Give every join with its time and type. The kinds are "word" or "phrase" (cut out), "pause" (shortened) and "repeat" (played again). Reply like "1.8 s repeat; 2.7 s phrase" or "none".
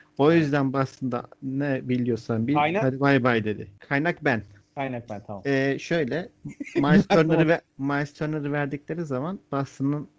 4.6 s pause; 7.7 s pause